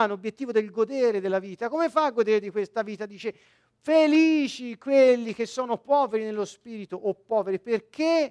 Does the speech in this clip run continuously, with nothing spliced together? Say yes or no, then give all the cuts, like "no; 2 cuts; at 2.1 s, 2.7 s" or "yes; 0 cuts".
yes; 0 cuts